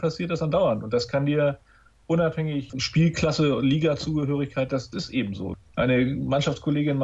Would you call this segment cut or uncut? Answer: uncut